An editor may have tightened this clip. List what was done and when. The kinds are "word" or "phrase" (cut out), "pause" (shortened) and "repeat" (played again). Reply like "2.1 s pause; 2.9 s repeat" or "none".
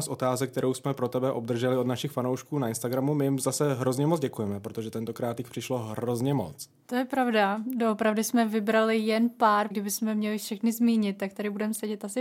9.7 s word